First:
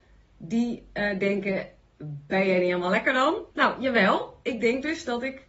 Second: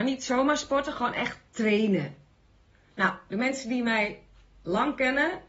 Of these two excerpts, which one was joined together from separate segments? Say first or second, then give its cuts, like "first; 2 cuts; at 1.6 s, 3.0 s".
first; 1 cut; at 3.5 s